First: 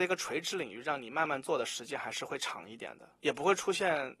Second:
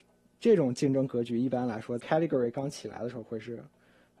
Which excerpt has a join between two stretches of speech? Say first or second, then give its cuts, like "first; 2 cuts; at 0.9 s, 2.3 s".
second; 1 cut; at 2.0 s